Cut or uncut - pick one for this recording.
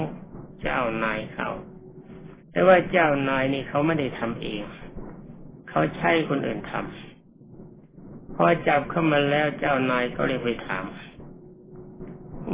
cut